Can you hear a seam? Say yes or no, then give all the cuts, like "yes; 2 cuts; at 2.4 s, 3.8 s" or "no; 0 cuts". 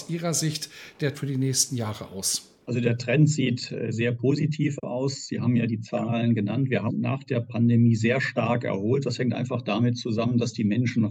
yes; 3 cuts; at 1.1 s, 2.6 s, 6.9 s